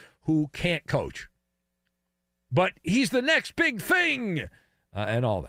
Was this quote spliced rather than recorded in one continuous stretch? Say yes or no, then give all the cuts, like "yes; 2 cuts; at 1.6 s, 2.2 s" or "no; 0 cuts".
no; 0 cuts